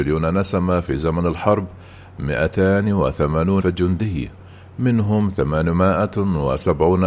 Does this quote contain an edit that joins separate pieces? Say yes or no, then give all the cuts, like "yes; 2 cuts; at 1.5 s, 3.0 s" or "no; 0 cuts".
yes; 1 cut; at 3.6 s